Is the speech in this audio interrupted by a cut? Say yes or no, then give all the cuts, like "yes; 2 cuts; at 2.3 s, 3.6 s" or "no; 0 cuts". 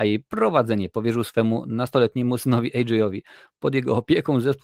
no; 0 cuts